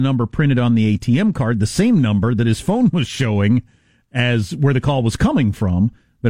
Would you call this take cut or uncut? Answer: uncut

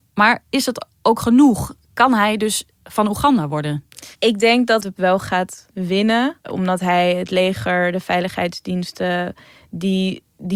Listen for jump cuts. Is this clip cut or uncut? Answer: cut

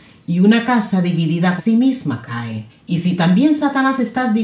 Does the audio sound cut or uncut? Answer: cut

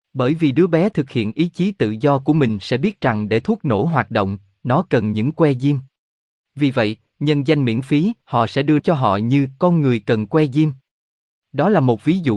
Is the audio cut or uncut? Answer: cut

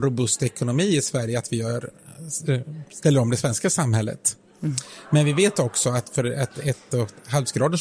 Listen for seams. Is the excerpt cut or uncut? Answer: uncut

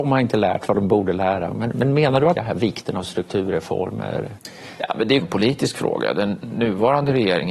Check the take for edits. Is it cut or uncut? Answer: cut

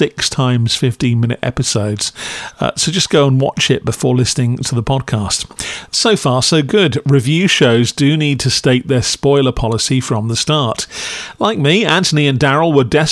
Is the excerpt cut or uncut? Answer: uncut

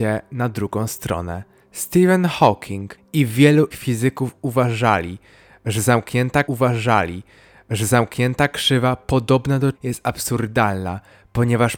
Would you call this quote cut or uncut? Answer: cut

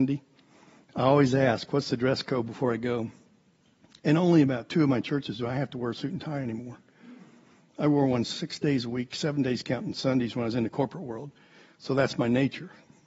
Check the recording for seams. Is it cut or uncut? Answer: uncut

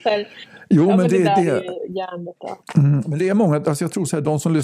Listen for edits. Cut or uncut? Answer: cut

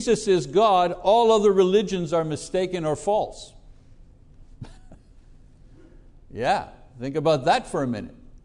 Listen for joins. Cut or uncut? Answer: cut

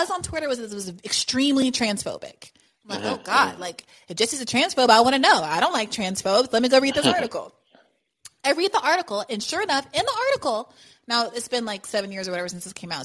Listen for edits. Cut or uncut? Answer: uncut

